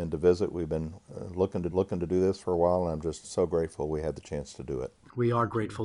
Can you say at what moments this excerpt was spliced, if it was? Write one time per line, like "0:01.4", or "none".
0:01.7
0:03.2